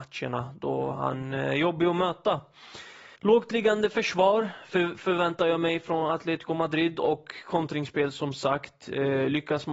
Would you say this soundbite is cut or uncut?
cut